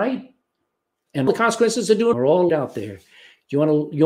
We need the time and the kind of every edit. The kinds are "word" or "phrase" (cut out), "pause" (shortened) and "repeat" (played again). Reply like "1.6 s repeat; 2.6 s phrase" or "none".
1.3 s word; 2.1 s word; 2.5 s word